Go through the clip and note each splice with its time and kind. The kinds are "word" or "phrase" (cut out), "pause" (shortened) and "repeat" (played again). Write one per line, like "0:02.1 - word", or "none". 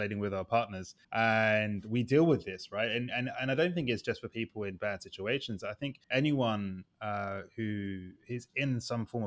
0:01.0 - pause
0:06.0 - pause
0:08.2 - pause